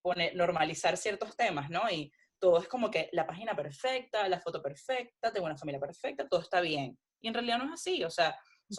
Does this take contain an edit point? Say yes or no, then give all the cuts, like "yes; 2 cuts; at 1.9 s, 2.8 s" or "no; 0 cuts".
no; 0 cuts